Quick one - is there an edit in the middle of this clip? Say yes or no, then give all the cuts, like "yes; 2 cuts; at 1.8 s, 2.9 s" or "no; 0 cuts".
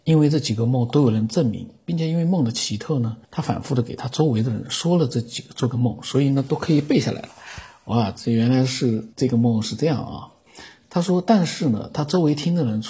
yes; 2 cuts; at 3.2 s, 9.1 s